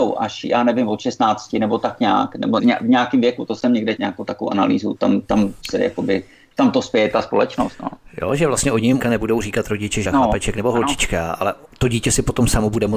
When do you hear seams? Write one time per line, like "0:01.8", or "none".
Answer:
0:02.6
0:04.0
0:05.0
0:05.6
0:09.0
0:10.0